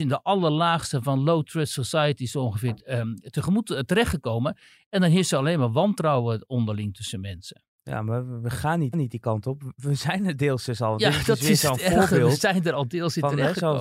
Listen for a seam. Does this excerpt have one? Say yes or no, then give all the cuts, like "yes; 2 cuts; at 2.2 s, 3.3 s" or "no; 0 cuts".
yes; 1 cut; at 8.9 s